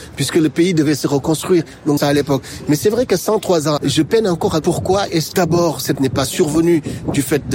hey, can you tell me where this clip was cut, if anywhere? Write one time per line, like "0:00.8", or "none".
0:02.0
0:03.8
0:04.6
0:05.3
0:05.9